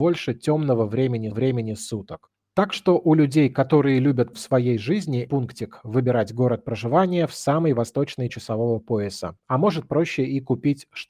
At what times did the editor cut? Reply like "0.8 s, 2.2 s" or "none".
1.3 s, 4.3 s, 5.3 s, 8.3 s